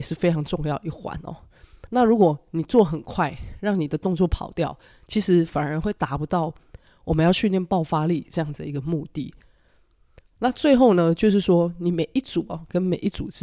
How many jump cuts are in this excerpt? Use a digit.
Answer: 0